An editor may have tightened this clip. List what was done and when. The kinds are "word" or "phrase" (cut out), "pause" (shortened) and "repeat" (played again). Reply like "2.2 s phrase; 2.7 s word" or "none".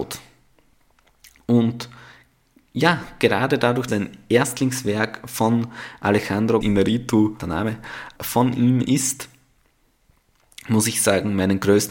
3.9 s word; 6.6 s word; 7.4 s phrase; 8.1 s word; 8.8 s word